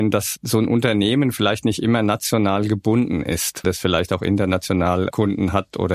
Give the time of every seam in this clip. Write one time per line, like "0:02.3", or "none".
0:03.6